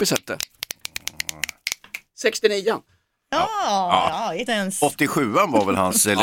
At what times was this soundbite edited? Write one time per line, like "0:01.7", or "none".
0:04.5